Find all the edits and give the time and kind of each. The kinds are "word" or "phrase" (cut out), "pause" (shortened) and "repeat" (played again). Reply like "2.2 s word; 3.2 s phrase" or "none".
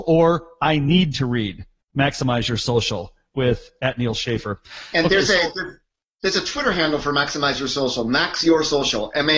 none